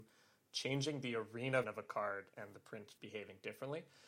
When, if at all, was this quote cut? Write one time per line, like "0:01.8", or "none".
0:01.6
0:03.0